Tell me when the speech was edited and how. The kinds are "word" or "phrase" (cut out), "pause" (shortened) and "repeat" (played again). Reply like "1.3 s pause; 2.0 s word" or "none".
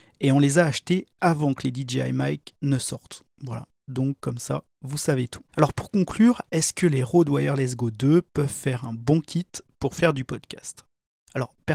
3.3 s pause; 5.5 s pause